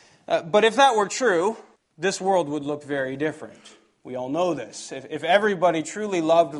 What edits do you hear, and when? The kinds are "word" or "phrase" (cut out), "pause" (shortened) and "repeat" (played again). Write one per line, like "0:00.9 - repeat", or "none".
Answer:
0:01.8 - pause